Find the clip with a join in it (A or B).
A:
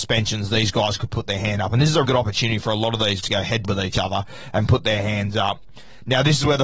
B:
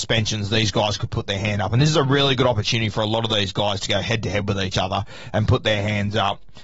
A